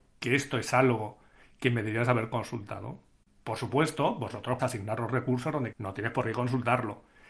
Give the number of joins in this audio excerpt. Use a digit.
2